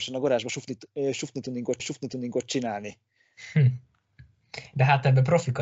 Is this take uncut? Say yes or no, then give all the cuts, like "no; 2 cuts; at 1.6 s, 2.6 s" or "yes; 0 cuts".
no; 1 cut; at 1.8 s